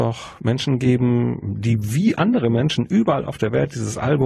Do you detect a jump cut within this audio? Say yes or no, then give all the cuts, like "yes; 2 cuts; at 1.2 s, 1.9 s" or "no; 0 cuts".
no; 0 cuts